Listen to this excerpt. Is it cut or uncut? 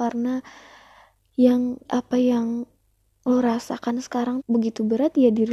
cut